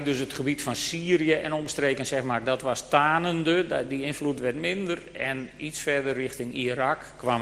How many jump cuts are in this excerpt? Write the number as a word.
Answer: zero